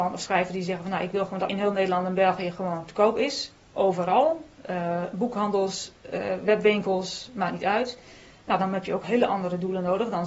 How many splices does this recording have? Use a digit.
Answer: 1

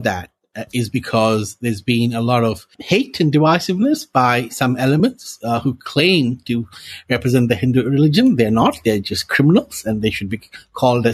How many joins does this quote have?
0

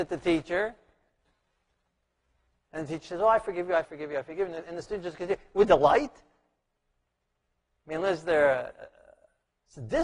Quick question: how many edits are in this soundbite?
2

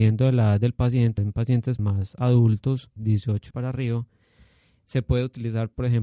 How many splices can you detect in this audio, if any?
4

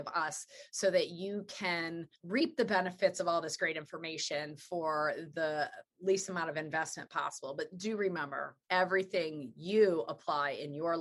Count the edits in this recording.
2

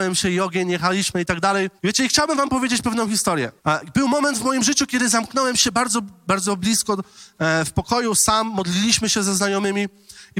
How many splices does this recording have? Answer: 2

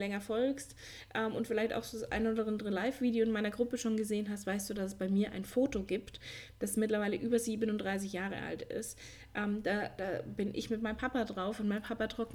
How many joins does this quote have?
0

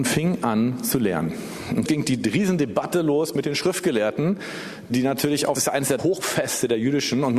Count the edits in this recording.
4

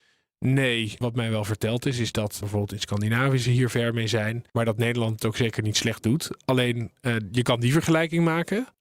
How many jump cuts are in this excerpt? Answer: 1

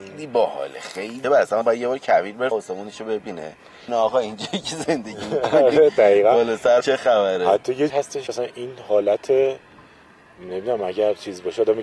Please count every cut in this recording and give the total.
7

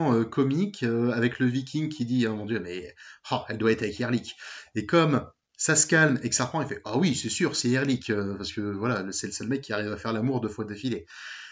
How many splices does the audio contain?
0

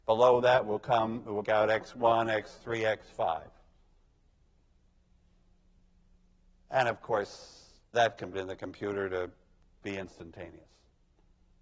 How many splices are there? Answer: 3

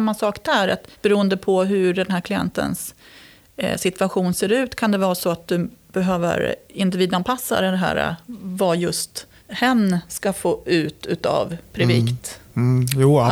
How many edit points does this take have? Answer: 2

